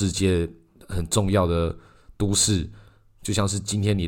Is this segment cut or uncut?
uncut